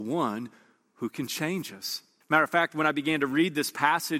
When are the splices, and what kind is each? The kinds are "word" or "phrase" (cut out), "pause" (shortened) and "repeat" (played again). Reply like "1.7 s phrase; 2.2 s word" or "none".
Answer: 2.2 s pause